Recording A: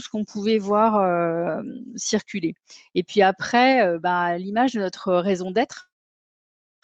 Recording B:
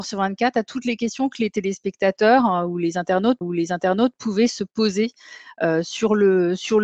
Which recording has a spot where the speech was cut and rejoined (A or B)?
B